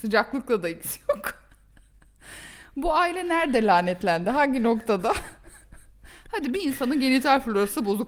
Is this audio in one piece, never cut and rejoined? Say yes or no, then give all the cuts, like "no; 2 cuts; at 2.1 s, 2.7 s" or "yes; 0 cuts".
yes; 0 cuts